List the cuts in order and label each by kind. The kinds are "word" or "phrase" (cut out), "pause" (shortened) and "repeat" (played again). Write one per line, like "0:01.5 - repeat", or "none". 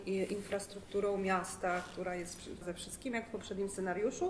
0:02.6 - word